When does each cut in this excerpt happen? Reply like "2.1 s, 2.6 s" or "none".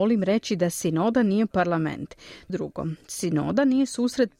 2.5 s